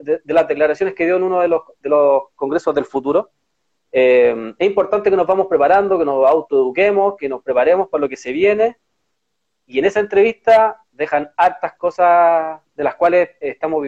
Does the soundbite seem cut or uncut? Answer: uncut